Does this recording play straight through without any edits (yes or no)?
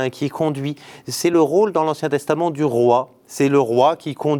yes